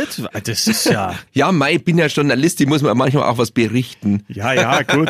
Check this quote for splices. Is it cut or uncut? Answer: cut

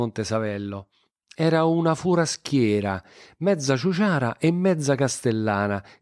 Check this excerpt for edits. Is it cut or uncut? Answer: uncut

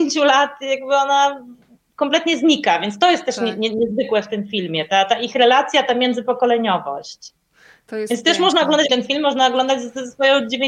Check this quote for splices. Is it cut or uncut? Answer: cut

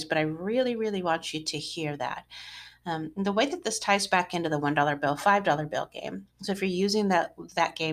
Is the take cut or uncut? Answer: uncut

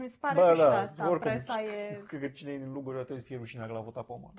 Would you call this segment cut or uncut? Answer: uncut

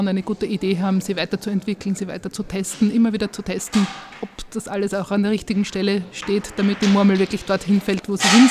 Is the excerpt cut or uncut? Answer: uncut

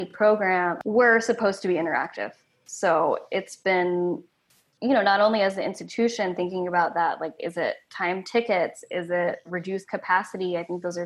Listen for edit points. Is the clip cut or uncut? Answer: uncut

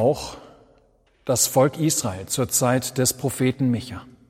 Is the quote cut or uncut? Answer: uncut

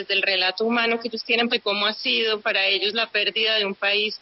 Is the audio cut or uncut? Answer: cut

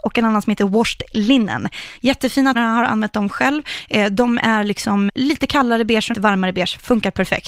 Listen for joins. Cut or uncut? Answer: cut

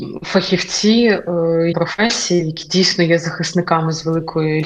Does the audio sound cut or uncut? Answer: cut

